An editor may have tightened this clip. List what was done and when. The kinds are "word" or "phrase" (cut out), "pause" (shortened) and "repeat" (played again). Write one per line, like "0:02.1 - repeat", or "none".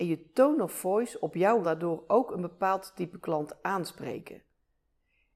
0:01.6 - phrase